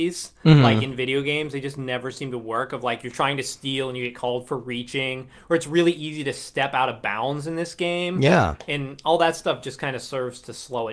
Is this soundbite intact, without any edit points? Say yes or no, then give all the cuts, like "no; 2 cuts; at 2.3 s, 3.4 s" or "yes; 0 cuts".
yes; 0 cuts